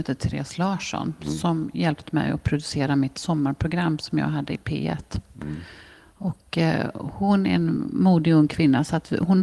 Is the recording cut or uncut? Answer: uncut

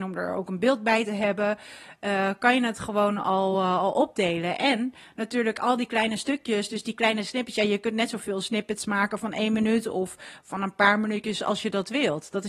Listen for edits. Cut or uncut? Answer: uncut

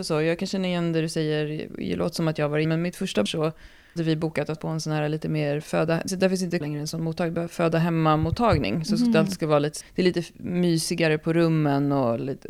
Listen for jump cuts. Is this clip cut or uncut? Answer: cut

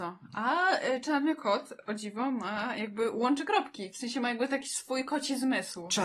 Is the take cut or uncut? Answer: uncut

